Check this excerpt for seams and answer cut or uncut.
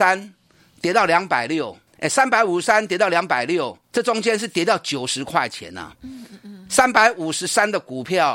cut